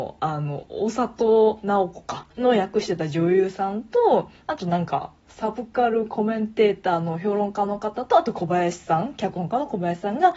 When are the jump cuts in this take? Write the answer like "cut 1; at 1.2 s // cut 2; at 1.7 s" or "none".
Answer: cut 1; at 2.3 s